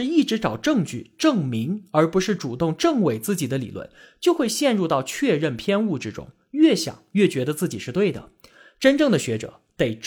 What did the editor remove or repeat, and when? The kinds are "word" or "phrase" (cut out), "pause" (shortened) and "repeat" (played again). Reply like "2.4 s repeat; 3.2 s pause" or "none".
none